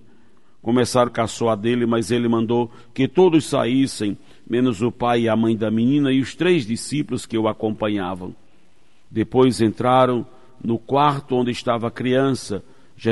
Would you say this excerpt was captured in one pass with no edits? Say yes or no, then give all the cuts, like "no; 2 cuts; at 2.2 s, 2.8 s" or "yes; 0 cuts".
no; 1 cut; at 1.1 s